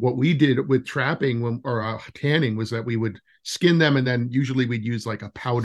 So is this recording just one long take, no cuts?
yes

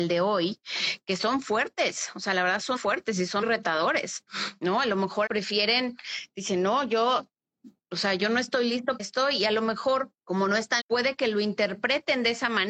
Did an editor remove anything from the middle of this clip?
yes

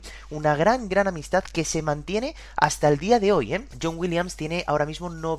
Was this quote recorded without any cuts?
yes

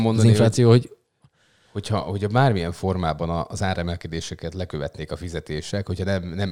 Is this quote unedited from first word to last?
yes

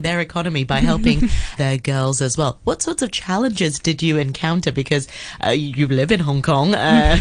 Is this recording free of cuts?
no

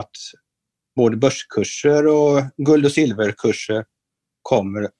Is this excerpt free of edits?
yes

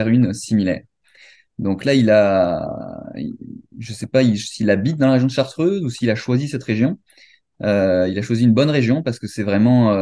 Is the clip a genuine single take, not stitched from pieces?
yes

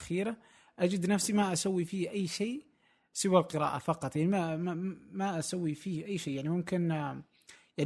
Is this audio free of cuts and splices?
yes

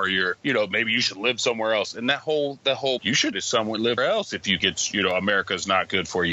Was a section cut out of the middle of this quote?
yes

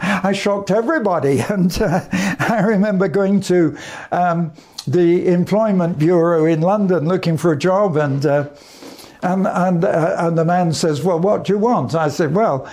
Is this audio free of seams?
yes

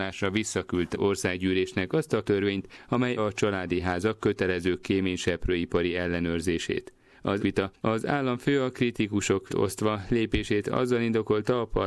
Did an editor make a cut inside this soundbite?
yes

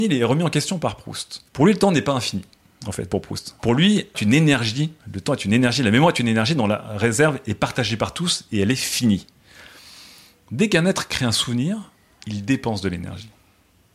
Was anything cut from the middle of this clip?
yes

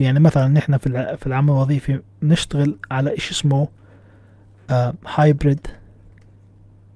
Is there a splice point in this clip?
no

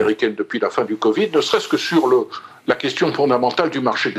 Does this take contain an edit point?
no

